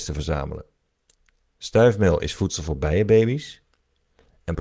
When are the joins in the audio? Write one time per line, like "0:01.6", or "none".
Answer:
none